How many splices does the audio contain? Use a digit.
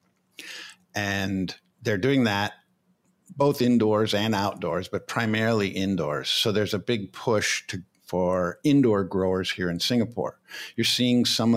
0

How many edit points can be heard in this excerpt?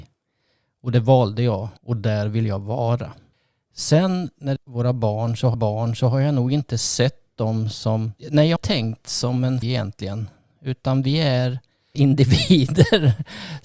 8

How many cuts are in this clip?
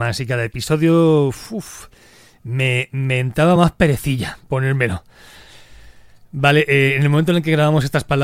0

